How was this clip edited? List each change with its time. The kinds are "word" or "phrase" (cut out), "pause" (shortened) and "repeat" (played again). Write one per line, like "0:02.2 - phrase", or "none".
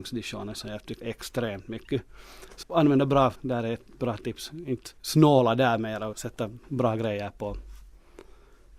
0:01.0 - word
0:02.6 - word
0:03.4 - word
0:05.0 - pause
0:06.1 - word
0:06.6 - word

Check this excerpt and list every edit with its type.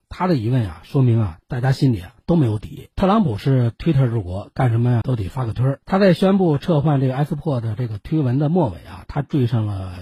0:02.9 - pause
0:05.0 - word
0:05.8 - pause

